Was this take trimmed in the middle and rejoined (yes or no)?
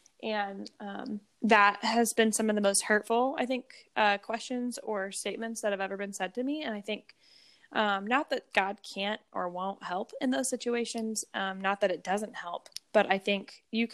no